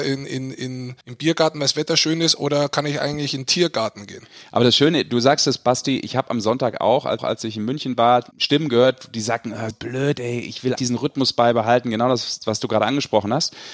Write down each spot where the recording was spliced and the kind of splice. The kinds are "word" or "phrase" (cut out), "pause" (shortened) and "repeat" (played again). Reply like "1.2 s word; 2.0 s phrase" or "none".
1.0 s pause; 7.2 s repeat; 8.3 s pause; 9.7 s word; 10.7 s word